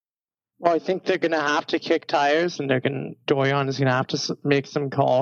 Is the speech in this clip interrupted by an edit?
no; 0 cuts

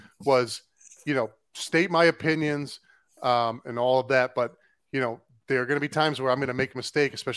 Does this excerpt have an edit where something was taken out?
no; 0 cuts

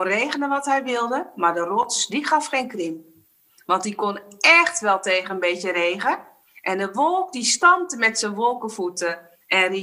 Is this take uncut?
yes; 0 cuts

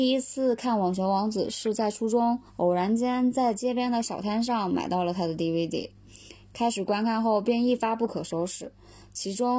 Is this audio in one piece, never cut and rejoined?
no; 1 cut; at 2.5 s

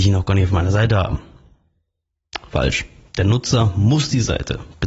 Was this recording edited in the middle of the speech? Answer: no; 0 cuts

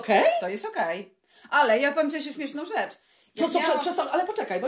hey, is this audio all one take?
yes; 0 cuts

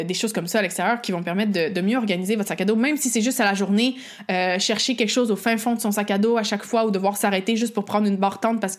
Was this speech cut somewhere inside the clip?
no; 0 cuts

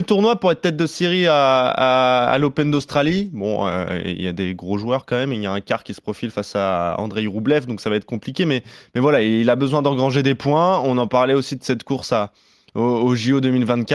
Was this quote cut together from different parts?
no; 0 cuts

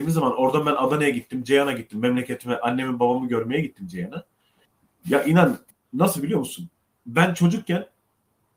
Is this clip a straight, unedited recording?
yes; 0 cuts

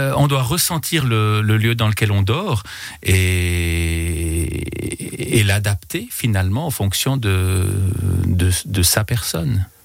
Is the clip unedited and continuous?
yes; 0 cuts

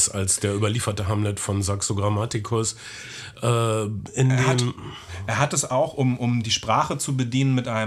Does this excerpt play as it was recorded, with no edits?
yes; 0 cuts

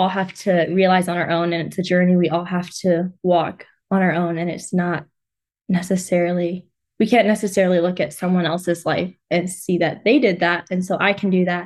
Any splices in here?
no; 0 cuts

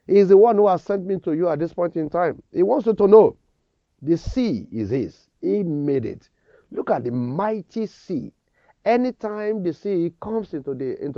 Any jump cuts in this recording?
no; 0 cuts

